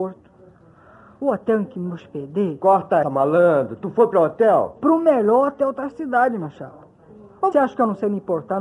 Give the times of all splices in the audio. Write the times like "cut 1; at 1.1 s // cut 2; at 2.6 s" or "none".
cut 1; at 3.0 s // cut 2; at 7.5 s